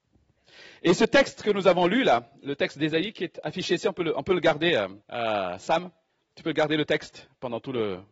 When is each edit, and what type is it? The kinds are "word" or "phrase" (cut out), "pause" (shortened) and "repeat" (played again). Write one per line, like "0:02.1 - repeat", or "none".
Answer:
0:05.0 - pause
0:06.1 - pause